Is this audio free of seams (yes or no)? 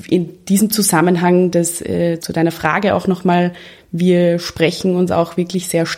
no